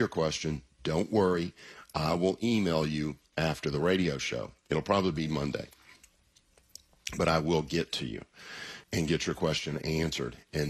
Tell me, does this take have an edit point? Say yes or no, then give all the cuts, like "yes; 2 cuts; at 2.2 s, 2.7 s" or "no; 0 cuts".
yes; 1 cut; at 8.8 s